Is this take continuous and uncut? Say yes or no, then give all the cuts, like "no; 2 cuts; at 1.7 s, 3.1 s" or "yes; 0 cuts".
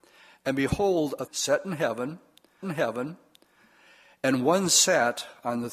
no; 2 cuts; at 1.3 s, 2.6 s